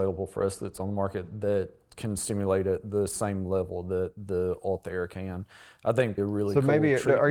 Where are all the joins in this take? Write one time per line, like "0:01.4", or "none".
0:06.2